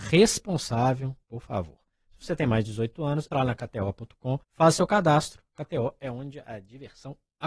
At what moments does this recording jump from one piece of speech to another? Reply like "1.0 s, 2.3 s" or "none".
1.2 s, 3.3 s, 4.4 s